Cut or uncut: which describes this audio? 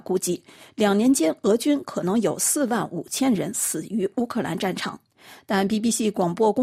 uncut